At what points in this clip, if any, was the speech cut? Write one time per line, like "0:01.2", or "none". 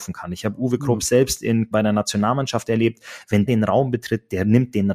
0:01.7
0:03.5